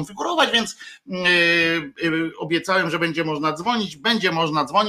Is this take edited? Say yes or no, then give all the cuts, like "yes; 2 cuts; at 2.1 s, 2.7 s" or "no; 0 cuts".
no; 0 cuts